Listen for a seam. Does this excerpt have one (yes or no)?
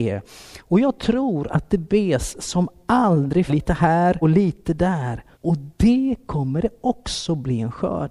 yes